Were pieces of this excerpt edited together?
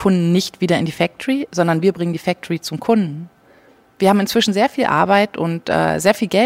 no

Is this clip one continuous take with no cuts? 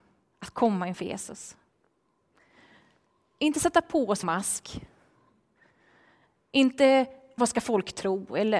no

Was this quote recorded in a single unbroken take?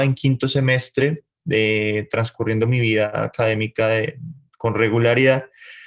yes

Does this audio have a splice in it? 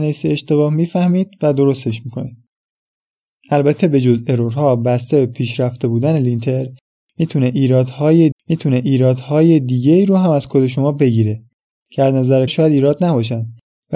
yes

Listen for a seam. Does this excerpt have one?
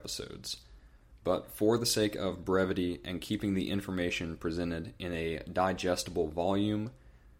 no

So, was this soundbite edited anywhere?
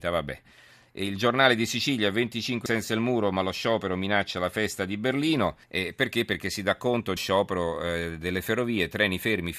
yes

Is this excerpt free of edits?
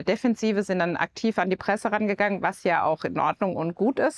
yes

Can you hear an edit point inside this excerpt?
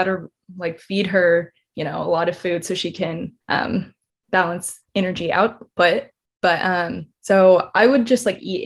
yes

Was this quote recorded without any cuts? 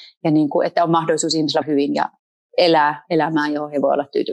no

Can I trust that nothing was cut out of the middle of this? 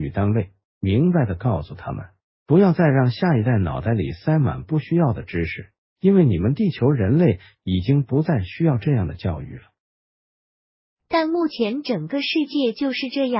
yes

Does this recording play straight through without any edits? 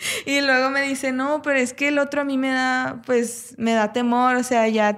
yes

